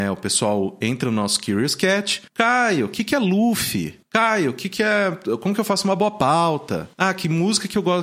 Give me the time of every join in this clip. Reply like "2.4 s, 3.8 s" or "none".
6.9 s